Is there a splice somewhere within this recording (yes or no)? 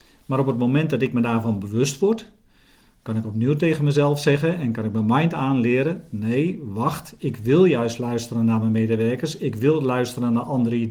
no